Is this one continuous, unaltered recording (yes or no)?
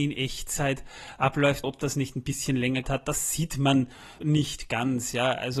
no